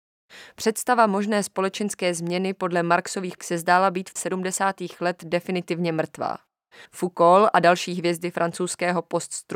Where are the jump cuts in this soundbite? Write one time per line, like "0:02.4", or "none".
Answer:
0:03.4
0:04.2
0:06.9